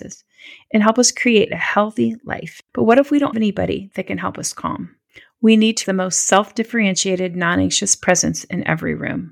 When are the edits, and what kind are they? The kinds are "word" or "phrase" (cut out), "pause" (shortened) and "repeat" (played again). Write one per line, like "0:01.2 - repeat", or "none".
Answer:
0:02.6 - pause
0:03.3 - word
0:05.1 - pause
0:05.8 - phrase